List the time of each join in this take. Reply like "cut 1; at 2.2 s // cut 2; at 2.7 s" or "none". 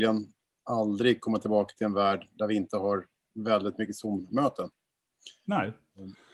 none